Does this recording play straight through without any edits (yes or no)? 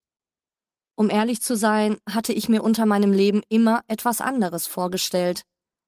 yes